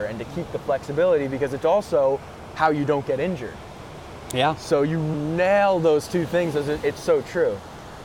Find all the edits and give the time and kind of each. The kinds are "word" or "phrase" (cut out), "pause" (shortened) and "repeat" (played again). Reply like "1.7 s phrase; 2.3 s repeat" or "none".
5.1 s word

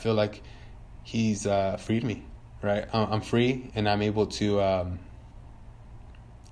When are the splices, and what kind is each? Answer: 3.7 s word

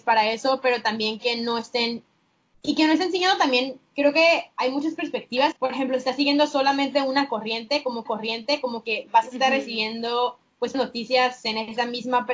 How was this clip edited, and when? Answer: 3.9 s pause; 5.5 s word; 8.1 s repeat; 10.7 s word

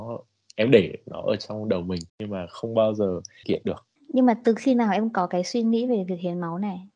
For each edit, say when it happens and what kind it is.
2.1 s pause; 3.4 s phrase; 4.0 s pause

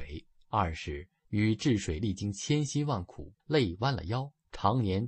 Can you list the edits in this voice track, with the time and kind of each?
3.4 s pause

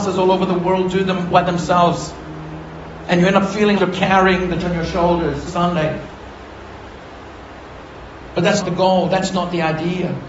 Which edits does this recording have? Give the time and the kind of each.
1.3 s word; 3.8 s word; 4.6 s word; 5.5 s word; 8.6 s word

